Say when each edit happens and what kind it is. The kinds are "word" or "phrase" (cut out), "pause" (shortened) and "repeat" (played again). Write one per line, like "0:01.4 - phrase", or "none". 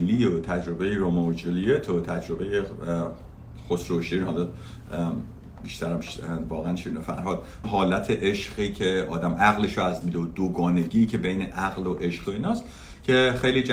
0:07.6 - word
0:10.0 - word
0:12.2 - word

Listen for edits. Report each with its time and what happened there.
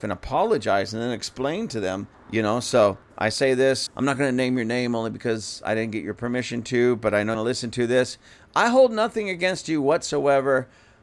0:02.1 - pause
0:03.9 - word
0:07.3 - phrase

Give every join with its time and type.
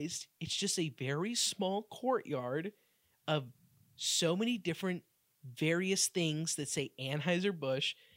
none

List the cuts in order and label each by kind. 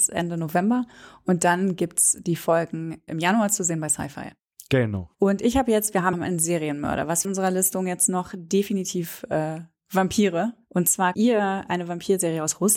0:03.1 - word
0:05.1 - pause
0:06.1 - phrase
0:07.2 - phrase
0:11.1 - word

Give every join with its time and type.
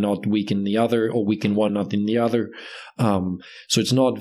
0:01.7 - word

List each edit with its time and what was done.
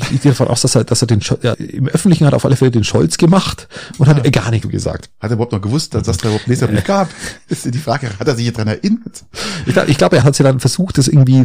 0:01.5 - word
0:04.6 - word
0:10.2 - phrase

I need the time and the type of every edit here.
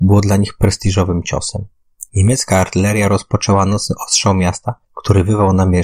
0:02.1 - pause
0:04.8 - pause

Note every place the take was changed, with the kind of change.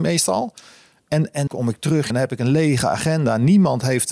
0:01.5 - word
0:02.1 - word

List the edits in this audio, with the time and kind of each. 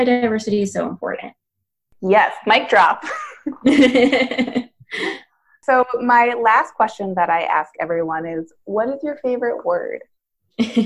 none

